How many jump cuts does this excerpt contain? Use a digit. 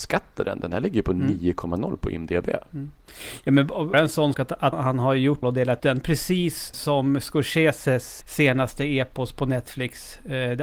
7